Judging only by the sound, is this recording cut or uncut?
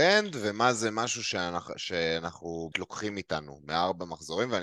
cut